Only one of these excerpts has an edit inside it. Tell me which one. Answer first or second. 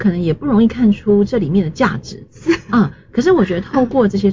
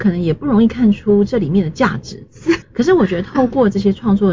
second